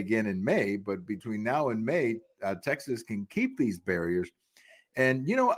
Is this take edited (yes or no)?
no